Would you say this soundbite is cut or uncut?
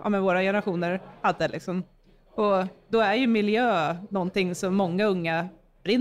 uncut